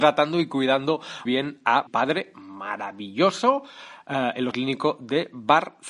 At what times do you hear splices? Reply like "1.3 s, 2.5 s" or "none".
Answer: 1.2 s, 1.9 s, 4.5 s